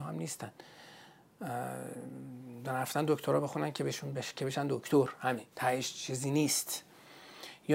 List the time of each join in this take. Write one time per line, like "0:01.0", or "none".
0:05.5

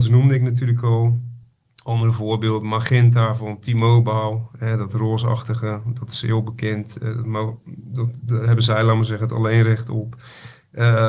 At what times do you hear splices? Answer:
none

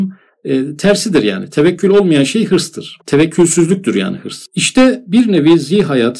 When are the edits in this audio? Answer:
0:03.0

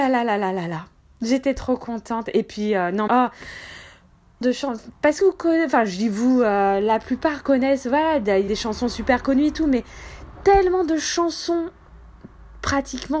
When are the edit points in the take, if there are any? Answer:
0:03.1
0:04.4
0:05.2
0:08.5

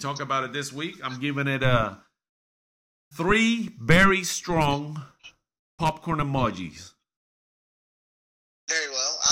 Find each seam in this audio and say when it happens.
none

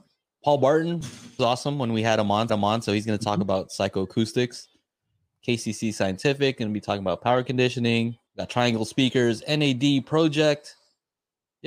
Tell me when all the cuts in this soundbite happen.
0:01.4
0:02.5
0:08.3

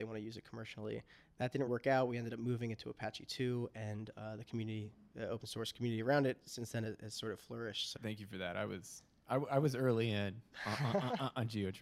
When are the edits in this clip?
0:01.7
0:08.0

